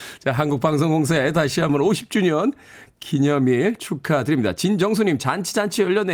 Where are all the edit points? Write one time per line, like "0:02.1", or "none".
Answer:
none